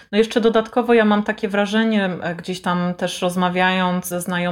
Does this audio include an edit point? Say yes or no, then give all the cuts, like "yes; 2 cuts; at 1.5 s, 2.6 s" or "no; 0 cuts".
no; 0 cuts